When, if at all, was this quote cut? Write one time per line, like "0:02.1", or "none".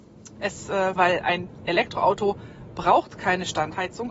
0:01.0